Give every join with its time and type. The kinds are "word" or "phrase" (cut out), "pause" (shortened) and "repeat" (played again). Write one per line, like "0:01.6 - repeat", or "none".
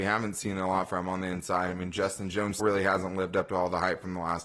0:02.6 - word